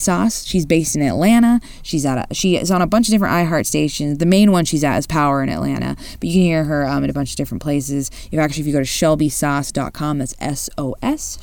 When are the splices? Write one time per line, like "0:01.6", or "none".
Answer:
none